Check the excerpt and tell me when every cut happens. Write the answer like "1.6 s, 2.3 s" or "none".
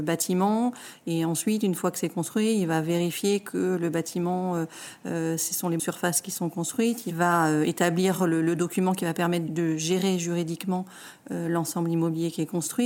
5.8 s